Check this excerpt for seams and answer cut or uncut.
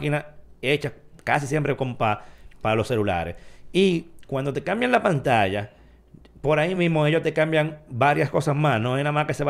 uncut